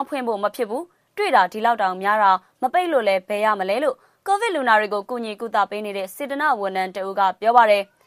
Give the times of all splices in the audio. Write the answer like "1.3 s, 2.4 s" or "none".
none